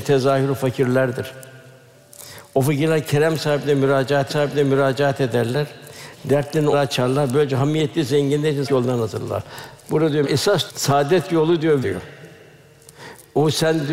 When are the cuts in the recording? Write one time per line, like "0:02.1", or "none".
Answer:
0:04.3
0:06.7
0:08.6
0:10.2
0:10.7
0:11.8